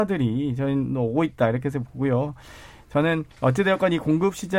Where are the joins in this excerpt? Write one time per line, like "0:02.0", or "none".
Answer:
0:03.3